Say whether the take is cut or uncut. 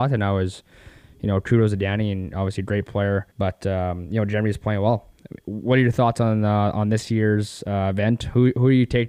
cut